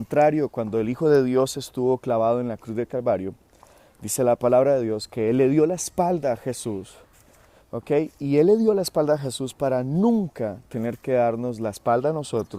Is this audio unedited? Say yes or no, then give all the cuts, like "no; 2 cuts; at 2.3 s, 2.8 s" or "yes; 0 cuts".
yes; 0 cuts